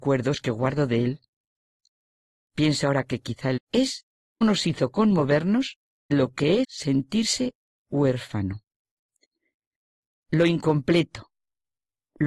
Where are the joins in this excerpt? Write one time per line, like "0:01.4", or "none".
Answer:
0:03.6
0:04.4
0:06.1
0:06.6

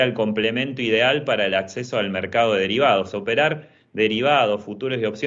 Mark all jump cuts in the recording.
none

